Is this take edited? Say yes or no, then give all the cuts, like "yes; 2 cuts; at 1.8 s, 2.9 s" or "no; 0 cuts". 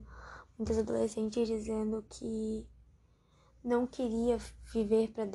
no; 0 cuts